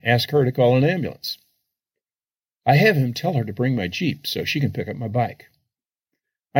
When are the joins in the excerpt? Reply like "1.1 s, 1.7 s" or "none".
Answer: none